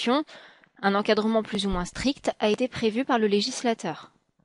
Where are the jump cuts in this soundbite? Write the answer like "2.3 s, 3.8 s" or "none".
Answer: none